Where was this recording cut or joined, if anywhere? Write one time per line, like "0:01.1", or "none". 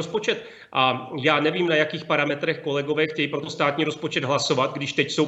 0:03.4